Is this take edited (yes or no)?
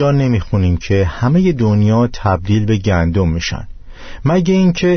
no